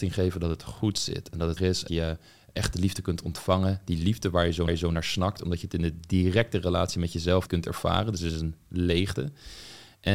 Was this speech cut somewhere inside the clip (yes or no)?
yes